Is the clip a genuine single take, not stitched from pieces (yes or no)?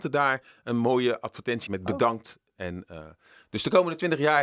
no